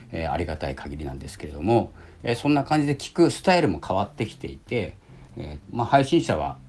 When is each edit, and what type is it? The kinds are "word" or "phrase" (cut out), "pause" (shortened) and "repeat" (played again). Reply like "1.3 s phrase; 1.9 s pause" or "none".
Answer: 5.3 s pause; 5.6 s word